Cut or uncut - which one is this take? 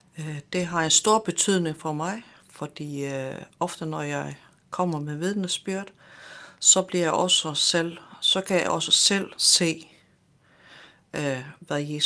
uncut